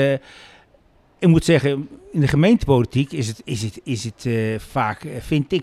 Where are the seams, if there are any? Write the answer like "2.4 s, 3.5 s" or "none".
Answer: none

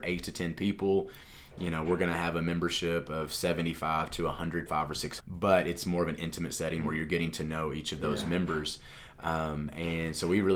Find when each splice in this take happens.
4.7 s, 5.2 s

